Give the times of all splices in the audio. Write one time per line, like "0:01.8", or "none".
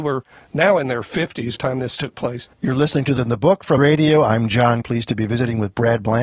0:01.6
0:02.5
0:03.2
0:03.8
0:04.8